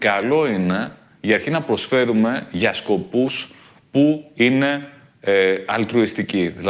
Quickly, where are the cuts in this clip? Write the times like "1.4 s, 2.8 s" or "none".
none